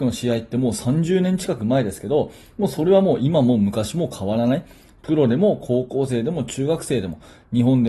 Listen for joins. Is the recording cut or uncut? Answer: uncut